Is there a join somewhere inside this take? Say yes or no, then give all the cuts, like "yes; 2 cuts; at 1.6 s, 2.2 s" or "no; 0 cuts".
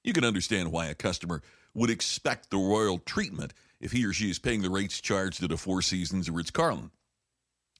no; 0 cuts